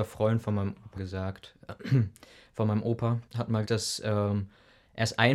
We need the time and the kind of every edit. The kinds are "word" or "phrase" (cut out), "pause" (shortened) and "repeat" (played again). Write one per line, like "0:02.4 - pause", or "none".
0:01.0 - phrase
0:03.3 - pause
0:03.6 - word